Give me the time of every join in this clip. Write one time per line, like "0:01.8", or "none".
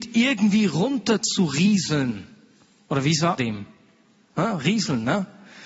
0:03.4